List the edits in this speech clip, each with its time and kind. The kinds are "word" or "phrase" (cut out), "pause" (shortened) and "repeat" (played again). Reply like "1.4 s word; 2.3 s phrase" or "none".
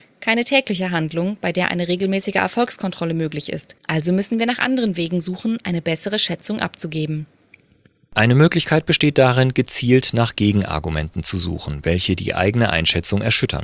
3.8 s pause